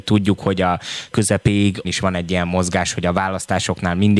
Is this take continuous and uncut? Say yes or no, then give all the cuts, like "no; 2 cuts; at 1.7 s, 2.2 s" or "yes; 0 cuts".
no; 2 cuts; at 1.1 s, 1.8 s